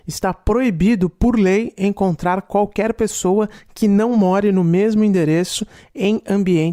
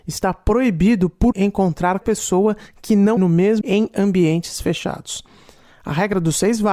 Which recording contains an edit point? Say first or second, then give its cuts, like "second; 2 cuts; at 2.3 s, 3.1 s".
second; 4 cuts; at 1.3 s, 2.0 s, 3.2 s, 3.6 s